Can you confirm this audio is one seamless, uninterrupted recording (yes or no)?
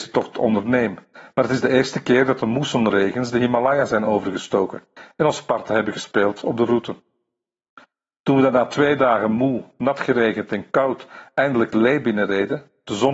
yes